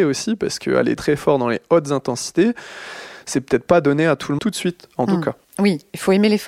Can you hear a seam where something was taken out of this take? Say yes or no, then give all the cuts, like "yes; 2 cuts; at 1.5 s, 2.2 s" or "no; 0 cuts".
yes; 3 cuts; at 1.0 s, 4.4 s, 5.4 s